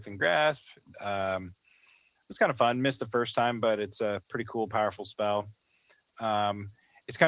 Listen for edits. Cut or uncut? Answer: uncut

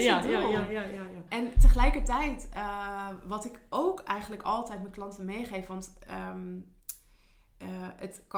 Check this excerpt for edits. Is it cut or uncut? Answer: uncut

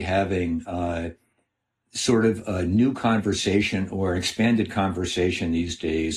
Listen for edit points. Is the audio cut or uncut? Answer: uncut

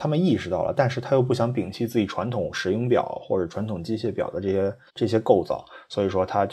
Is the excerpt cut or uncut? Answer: cut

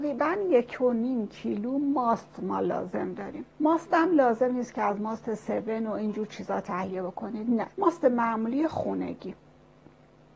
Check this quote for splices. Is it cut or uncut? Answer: cut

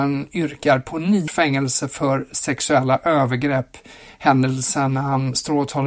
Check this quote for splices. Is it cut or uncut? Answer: cut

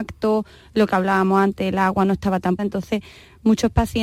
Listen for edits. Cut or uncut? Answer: cut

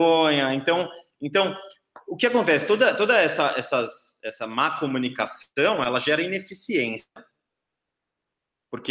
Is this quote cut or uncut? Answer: uncut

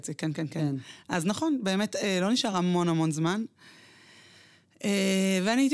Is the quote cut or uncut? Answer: uncut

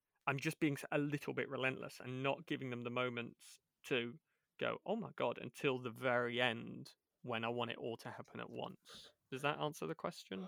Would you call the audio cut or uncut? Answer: uncut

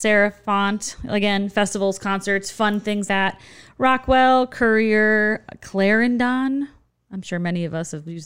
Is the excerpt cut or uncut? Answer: cut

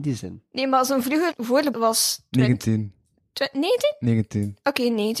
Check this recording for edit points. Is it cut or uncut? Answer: cut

